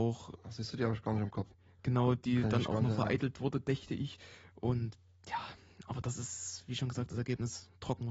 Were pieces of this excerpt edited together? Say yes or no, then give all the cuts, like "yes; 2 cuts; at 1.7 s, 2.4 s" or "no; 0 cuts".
no; 0 cuts